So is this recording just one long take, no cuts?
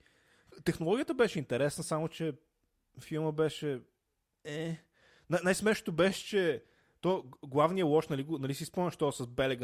yes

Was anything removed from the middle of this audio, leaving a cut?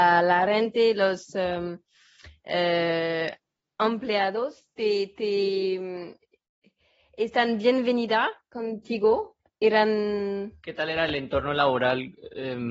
no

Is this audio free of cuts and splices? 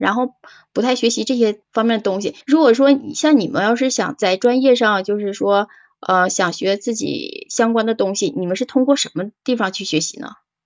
no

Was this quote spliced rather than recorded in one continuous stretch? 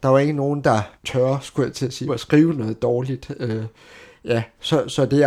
yes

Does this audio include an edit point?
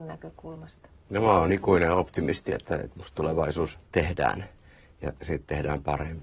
yes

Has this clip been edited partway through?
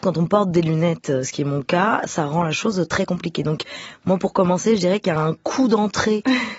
no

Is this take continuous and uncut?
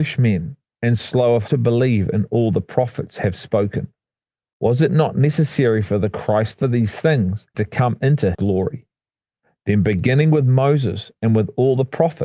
no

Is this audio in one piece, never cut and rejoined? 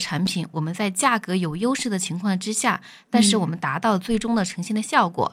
yes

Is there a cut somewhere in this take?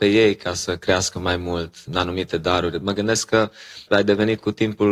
yes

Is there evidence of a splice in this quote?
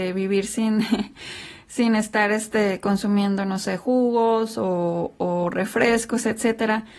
no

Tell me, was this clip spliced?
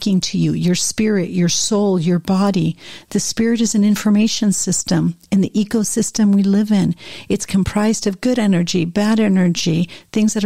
no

